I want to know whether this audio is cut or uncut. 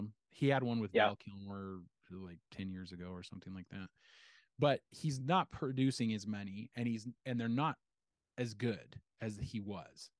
uncut